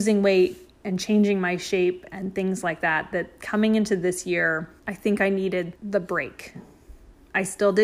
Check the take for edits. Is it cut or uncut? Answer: cut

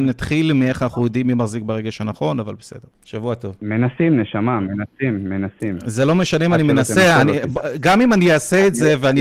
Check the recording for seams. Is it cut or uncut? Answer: cut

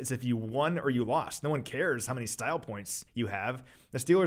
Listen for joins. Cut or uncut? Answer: cut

